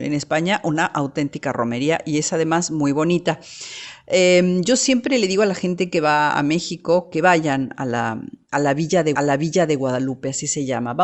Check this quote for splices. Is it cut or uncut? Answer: cut